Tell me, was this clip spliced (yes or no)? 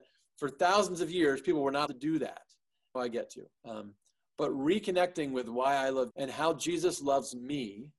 yes